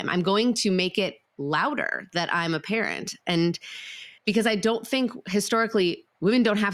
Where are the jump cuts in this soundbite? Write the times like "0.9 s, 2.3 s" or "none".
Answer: 4.2 s